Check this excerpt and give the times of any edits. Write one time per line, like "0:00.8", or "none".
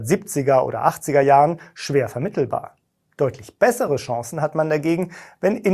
none